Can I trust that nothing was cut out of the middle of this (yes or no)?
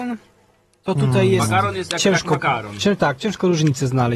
yes